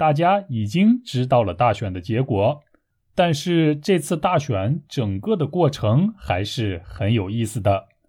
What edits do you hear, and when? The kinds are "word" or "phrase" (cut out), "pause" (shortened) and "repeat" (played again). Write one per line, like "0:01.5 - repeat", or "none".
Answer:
none